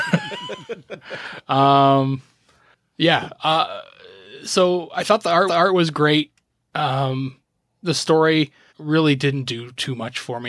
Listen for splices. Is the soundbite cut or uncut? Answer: cut